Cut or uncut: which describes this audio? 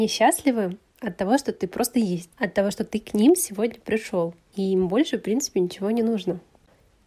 uncut